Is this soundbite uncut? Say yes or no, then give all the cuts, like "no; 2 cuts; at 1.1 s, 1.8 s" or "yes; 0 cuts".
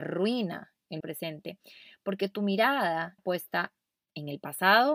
no; 2 cuts; at 1.0 s, 3.2 s